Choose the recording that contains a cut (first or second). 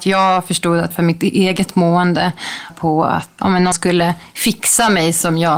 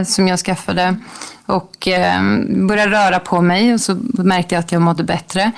first